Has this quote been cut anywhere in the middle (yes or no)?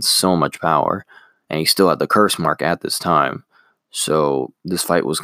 no